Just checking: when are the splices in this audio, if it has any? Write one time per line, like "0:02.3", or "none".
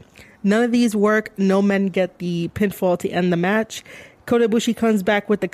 none